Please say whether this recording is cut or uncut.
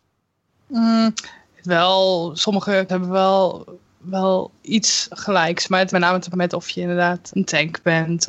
cut